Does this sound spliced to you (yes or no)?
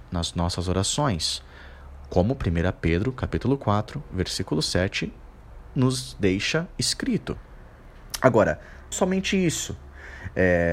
yes